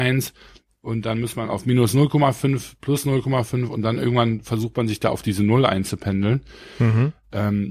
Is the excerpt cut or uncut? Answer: uncut